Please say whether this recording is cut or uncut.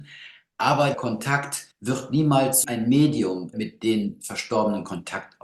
cut